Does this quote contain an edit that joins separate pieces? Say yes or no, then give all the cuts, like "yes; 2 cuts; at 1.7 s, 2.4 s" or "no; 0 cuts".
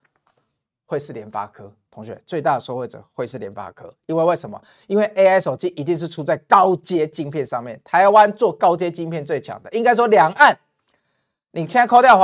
no; 0 cuts